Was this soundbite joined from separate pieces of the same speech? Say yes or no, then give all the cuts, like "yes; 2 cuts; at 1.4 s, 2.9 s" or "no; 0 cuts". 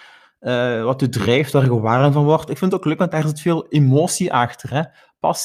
no; 0 cuts